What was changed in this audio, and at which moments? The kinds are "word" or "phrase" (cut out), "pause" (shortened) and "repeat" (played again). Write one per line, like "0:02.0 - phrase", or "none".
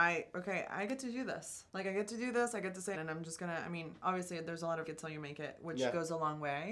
0:01.7 - pause
0:02.9 - phrase
0:04.9 - phrase